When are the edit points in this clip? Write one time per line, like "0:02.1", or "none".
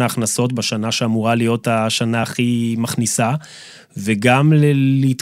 none